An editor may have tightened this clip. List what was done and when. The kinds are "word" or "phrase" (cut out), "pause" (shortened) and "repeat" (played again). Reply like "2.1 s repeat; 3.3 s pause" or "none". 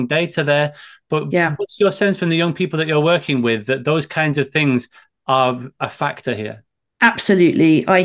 none